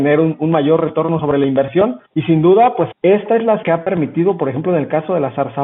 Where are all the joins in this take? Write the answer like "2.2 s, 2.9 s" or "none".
2.0 s, 2.9 s, 3.6 s